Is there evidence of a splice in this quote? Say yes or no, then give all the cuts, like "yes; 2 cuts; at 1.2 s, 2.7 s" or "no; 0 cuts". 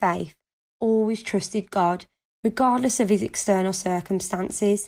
no; 0 cuts